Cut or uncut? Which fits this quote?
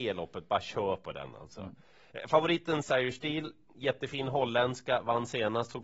cut